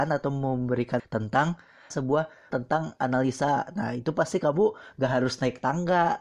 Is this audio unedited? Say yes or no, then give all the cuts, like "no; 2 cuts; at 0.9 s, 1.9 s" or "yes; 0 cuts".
no; 3 cuts; at 1.0 s, 1.9 s, 2.5 s